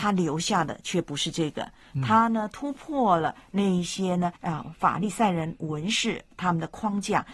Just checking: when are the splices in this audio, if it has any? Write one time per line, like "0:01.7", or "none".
0:04.4